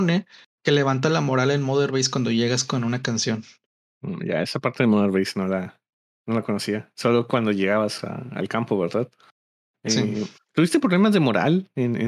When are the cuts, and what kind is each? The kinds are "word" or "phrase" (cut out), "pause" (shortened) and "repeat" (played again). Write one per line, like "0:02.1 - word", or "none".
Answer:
none